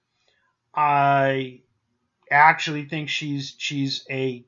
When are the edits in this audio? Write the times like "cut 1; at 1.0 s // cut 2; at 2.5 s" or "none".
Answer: none